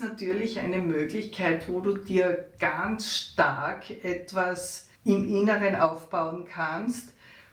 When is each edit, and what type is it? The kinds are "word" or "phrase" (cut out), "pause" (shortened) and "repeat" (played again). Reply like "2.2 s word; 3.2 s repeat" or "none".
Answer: 5.0 s pause

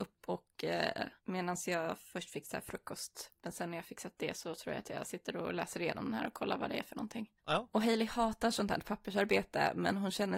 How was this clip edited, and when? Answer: 1.2 s pause; 7.4 s pause

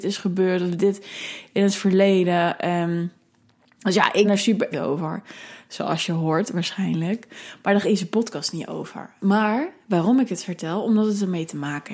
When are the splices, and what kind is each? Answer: 4.2 s word; 4.7 s word; 7.8 s word

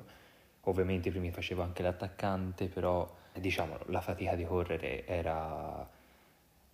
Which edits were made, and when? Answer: 1.3 s word; 3.3 s word

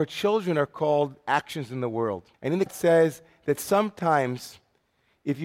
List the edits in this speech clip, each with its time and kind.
2.3 s pause; 2.7 s word

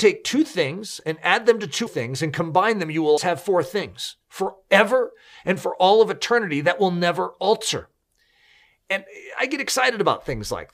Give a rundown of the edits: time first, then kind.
1.9 s word; 3.2 s word; 4.2 s pause

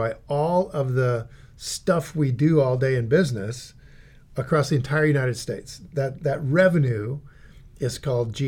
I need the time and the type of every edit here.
none

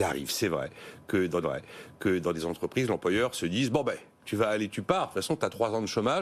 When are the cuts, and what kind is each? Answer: 1.4 s repeat

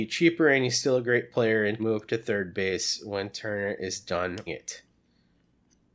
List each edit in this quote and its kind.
1.8 s word; 4.5 s word

